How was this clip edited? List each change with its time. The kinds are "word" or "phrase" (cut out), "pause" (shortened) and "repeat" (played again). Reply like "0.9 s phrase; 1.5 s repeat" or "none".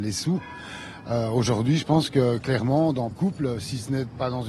3.1 s phrase